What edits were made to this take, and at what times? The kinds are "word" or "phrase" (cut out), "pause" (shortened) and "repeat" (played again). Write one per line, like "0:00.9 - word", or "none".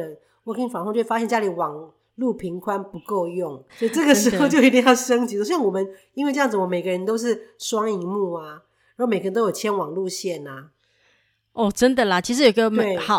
0:03.7 - phrase